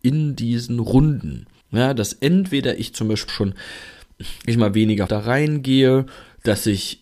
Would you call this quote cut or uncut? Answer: cut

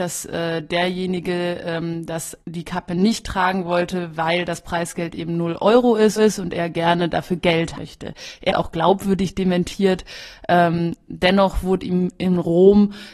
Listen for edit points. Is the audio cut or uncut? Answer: cut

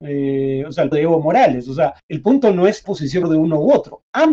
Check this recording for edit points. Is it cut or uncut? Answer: cut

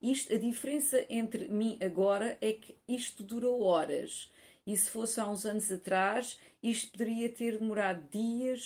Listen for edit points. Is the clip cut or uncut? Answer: uncut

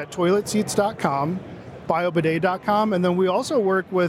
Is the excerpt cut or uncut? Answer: uncut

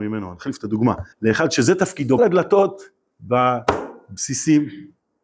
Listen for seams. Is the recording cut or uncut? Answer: cut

